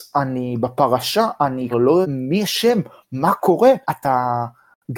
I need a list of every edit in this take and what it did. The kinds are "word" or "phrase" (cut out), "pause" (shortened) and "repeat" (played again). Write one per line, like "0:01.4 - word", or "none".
0:01.7 - word
0:02.0 - word
0:03.8 - pause